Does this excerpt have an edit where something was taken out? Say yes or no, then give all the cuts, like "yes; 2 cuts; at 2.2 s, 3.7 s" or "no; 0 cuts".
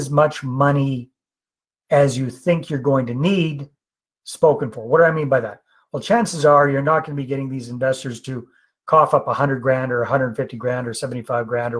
no; 0 cuts